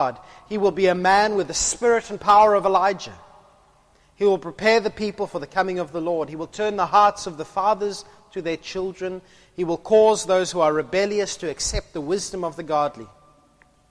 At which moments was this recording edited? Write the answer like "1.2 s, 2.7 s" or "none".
none